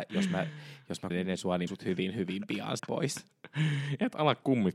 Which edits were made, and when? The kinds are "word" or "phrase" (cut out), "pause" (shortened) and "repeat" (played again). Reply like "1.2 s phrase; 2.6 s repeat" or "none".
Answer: 1.1 s word; 1.7 s phrase; 2.8 s word